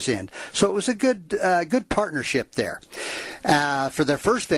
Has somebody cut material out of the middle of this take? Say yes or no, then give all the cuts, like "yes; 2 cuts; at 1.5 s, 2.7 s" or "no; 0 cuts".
no; 0 cuts